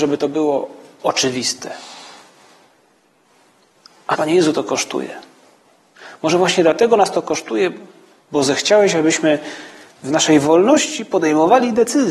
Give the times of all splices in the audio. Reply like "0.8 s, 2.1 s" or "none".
4.1 s